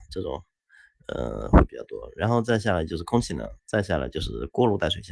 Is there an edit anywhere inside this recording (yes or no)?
yes